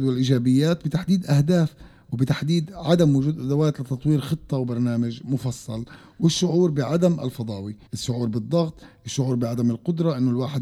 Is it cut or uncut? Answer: cut